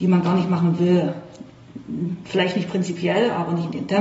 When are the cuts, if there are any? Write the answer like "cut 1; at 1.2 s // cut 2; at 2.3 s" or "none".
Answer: none